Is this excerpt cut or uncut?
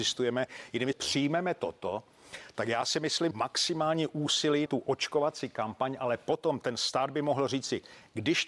cut